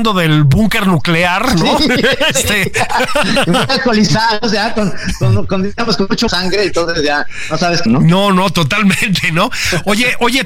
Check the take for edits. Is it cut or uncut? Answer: cut